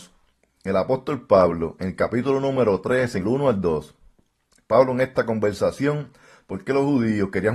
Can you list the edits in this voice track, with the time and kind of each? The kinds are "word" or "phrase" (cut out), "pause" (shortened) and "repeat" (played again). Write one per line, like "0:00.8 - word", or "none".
0:03.2 - phrase